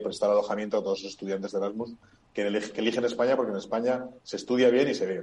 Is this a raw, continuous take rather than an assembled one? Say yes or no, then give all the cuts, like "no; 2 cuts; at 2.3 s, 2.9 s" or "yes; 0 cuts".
yes; 0 cuts